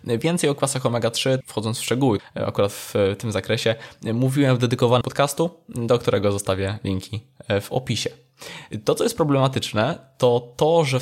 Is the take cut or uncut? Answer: cut